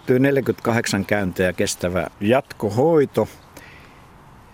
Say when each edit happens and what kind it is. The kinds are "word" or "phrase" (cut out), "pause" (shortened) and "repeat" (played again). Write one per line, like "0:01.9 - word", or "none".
0:02.1 - pause